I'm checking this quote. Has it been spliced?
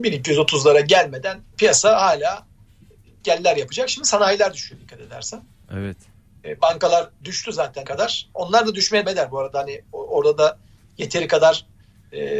yes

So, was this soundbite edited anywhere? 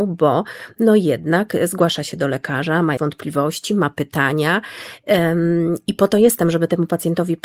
yes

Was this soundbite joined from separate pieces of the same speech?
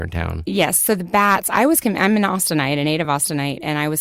no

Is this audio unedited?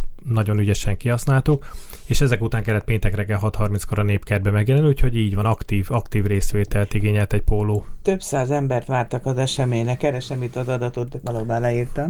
yes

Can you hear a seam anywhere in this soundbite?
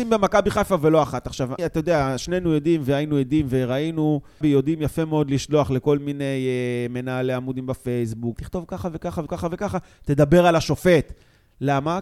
yes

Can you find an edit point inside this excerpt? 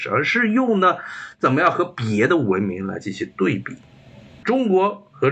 no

